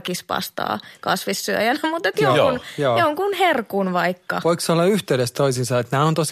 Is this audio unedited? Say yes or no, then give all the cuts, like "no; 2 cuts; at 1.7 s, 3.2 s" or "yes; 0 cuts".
yes; 0 cuts